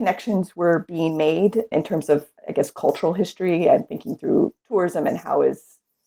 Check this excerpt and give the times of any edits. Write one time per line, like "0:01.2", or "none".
0:01.7
0:02.4